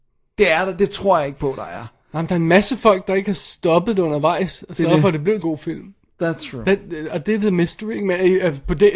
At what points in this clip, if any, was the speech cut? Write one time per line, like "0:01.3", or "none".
0:05.4